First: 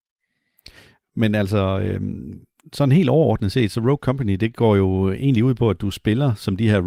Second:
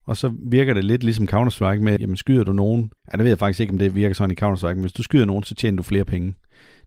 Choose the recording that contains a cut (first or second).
second